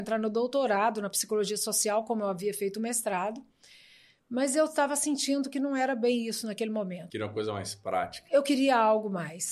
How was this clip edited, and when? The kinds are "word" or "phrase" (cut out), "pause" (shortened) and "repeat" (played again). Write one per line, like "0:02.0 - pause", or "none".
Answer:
none